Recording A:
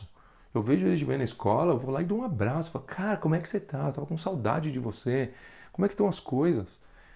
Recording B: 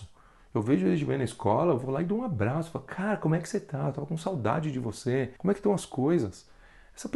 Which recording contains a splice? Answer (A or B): B